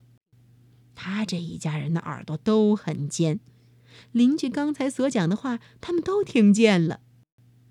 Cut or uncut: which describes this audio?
uncut